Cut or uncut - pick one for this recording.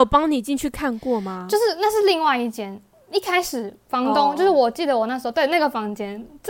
uncut